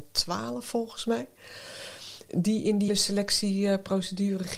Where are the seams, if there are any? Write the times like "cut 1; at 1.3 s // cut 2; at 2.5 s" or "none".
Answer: cut 1; at 2.9 s